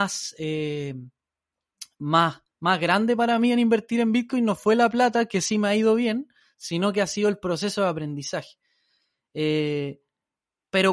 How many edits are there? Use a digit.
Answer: 0